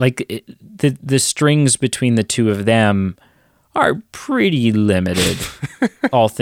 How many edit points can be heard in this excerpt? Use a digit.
0